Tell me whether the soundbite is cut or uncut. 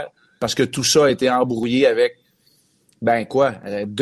uncut